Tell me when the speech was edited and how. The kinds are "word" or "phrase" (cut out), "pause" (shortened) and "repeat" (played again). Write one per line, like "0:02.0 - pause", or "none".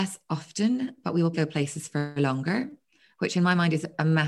0:01.3 - word